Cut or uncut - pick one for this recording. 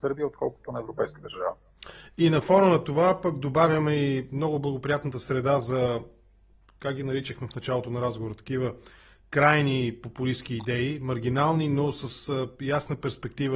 uncut